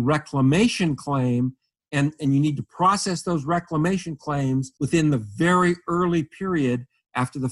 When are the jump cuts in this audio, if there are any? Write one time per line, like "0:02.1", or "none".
none

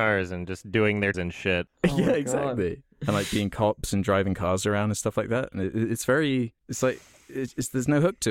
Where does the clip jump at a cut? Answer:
0:01.1
0:02.9
0:06.6

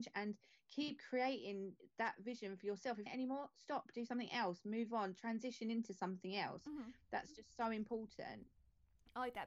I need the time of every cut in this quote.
0:03.1

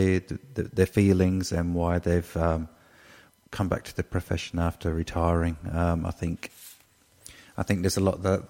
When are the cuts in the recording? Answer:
none

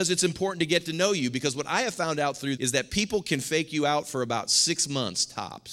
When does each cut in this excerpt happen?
0:02.6

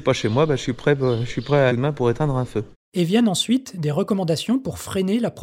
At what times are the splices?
0:01.7

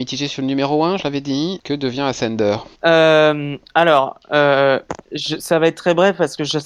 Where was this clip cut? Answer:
0:02.8

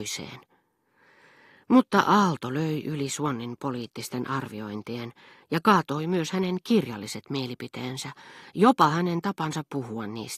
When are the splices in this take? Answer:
none

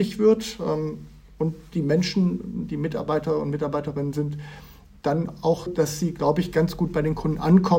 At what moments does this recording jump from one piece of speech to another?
0:05.7

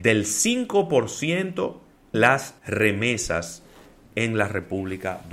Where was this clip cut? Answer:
0:02.1
0:02.6

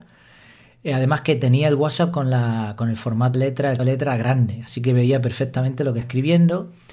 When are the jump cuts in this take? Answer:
0:03.3
0:03.8
0:06.0

